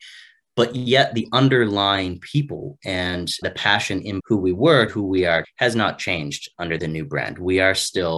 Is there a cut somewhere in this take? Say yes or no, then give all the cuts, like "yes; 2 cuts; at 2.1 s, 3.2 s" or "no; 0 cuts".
yes; 5 cuts; at 3.4 s, 4.2 s, 4.9 s, 5.4 s, 6.8 s